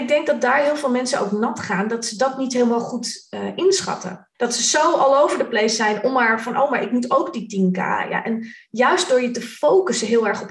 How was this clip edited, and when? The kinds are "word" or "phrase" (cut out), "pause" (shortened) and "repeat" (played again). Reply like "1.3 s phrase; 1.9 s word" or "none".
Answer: 4.3 s pause